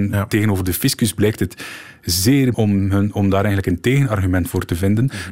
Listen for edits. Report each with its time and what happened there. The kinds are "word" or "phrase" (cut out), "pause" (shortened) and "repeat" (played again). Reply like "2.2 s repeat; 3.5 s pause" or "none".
2.5 s phrase